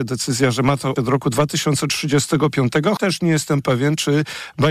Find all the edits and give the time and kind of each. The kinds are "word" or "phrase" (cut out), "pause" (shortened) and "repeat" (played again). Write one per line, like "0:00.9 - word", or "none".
0:01.0 - word
0:03.0 - word